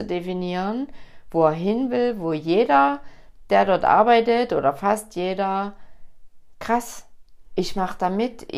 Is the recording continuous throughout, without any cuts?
no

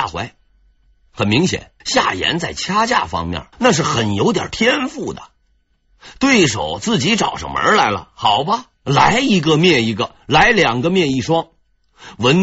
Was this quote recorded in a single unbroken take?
no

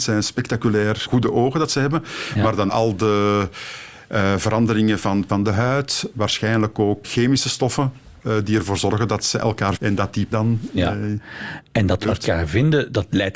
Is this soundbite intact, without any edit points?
no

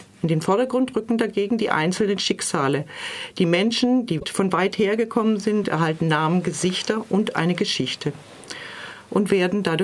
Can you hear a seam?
no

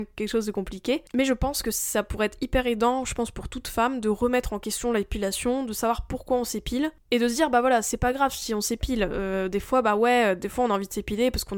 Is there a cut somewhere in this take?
no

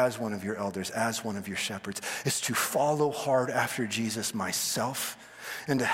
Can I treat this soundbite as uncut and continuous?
yes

